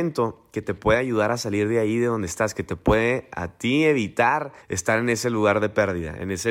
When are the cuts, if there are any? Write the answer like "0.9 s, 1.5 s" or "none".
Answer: 4.6 s